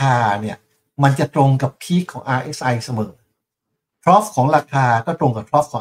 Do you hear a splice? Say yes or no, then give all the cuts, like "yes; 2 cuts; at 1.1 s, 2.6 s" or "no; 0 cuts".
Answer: no; 0 cuts